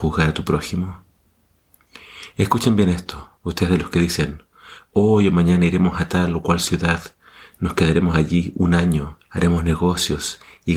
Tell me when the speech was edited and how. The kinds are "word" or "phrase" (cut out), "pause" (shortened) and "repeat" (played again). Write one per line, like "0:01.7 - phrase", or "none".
0:03.4 - pause
0:09.2 - pause

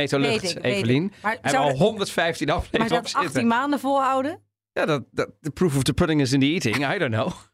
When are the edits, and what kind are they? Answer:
0:02.9 - word

